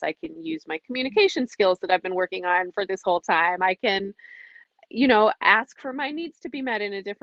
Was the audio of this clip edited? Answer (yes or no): no